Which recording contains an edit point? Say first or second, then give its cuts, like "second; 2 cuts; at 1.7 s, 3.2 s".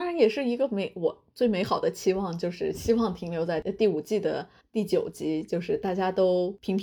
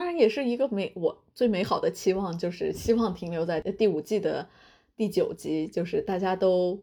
first; 1 cut; at 4.6 s